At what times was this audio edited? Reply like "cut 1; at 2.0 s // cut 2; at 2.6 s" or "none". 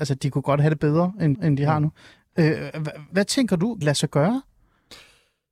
cut 1; at 1.3 s // cut 2; at 3.1 s // cut 3; at 3.8 s